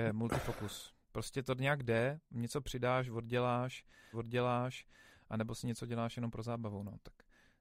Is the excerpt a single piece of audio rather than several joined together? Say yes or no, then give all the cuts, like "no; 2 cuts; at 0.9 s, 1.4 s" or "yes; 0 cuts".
no; 2 cuts; at 1.0 s, 4.1 s